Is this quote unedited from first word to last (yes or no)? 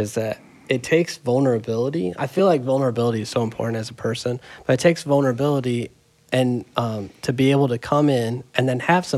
yes